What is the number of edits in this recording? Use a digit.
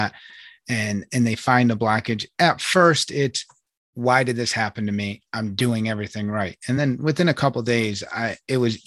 0